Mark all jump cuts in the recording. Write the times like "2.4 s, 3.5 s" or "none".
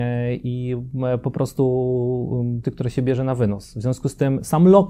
2.6 s